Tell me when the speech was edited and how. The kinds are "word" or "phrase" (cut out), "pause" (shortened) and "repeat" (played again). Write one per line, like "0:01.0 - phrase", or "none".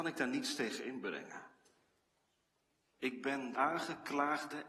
0:03.5 - word